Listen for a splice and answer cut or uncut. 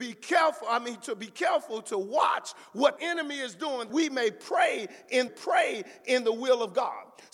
cut